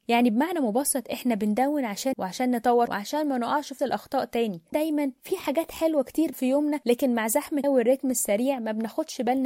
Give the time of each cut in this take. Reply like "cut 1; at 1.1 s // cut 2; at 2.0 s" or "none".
cut 1; at 2.1 s // cut 2; at 2.9 s // cut 3; at 3.8 s // cut 4; at 4.7 s // cut 5; at 6.3 s // cut 6; at 7.6 s